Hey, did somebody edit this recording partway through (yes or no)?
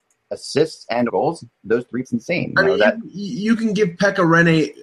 yes